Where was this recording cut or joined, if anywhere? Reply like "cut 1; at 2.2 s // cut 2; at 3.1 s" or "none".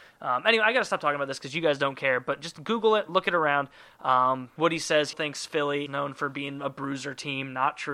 cut 1; at 4.6 s // cut 2; at 5.1 s // cut 3; at 5.9 s